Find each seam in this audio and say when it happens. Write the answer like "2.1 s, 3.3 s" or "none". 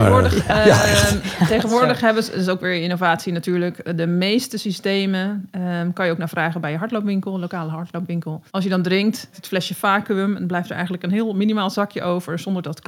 8.5 s, 9.3 s